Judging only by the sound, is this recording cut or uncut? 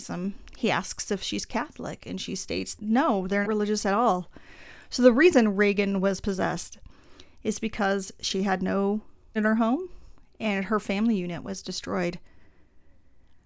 cut